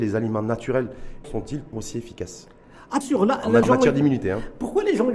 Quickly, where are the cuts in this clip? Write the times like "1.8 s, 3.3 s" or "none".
1.2 s, 1.7 s, 3.0 s, 3.6 s